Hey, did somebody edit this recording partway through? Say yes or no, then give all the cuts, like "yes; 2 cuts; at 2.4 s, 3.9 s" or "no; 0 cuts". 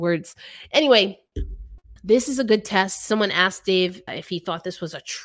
yes; 2 cuts; at 2.0 s, 4.1 s